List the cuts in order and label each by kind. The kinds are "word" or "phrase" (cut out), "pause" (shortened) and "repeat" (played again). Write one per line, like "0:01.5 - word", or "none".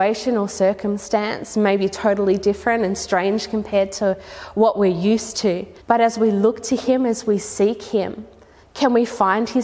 0:05.8 - pause